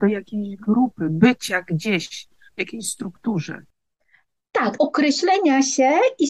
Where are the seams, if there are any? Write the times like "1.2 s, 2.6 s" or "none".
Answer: 4.8 s